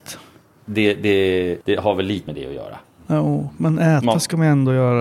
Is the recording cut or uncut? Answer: cut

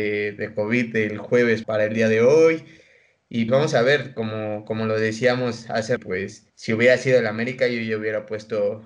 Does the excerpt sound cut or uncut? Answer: cut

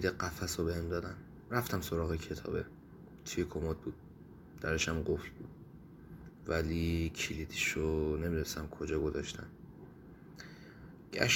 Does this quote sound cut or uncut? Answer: uncut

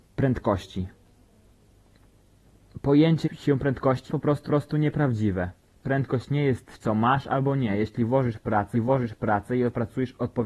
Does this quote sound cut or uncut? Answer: cut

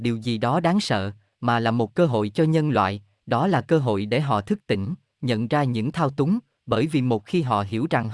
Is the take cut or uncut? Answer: uncut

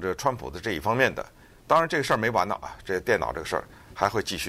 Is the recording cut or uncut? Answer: uncut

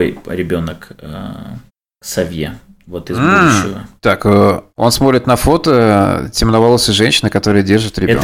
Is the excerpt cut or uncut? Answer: cut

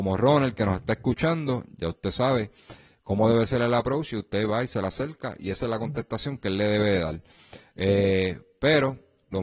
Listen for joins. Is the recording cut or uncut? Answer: uncut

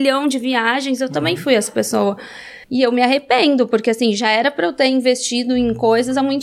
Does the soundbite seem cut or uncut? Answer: cut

